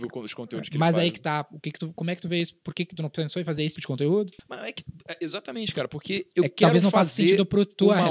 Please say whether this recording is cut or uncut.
cut